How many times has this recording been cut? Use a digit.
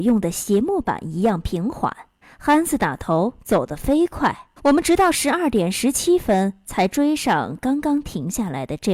2